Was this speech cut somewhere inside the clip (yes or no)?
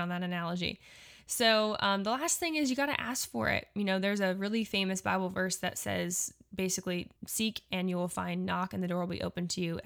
yes